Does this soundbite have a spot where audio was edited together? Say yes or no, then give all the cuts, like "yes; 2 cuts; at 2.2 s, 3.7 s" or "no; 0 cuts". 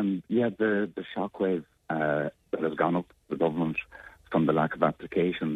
no; 0 cuts